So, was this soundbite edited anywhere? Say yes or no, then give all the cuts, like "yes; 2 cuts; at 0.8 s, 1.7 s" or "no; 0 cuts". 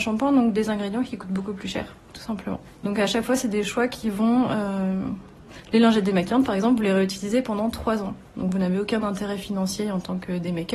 yes; 1 cut; at 2.7 s